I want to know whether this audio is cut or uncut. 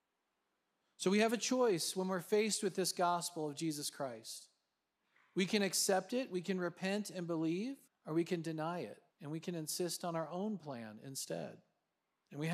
cut